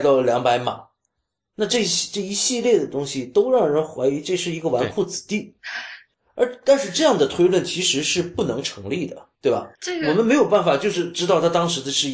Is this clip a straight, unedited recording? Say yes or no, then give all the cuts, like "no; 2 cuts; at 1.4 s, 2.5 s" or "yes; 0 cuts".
no; 3 cuts; at 6.1 s, 9.3 s, 9.8 s